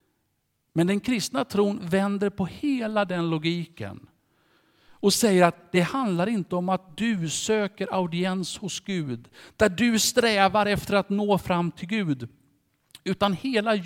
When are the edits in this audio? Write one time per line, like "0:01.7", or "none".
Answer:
none